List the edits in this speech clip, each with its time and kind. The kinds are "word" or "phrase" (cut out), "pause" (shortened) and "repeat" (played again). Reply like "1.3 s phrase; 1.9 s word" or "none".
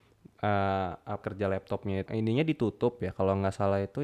1.2 s word; 2.1 s word

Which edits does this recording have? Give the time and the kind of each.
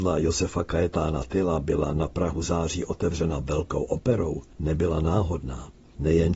4.5 s pause

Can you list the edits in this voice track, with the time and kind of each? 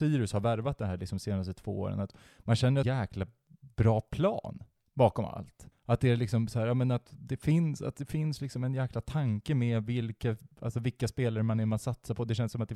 2.8 s phrase; 5.7 s pause

